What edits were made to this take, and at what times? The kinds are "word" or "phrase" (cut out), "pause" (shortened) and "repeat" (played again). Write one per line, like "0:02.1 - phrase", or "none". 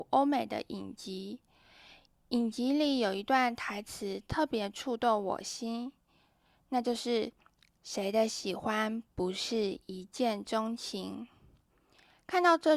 0:07.4 - pause